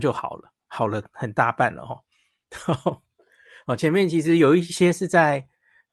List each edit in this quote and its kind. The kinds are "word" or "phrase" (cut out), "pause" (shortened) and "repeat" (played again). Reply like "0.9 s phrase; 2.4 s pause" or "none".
none